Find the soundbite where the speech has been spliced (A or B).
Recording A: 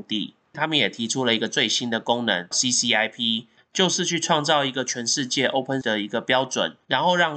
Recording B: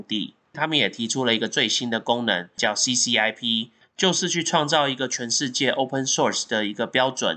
A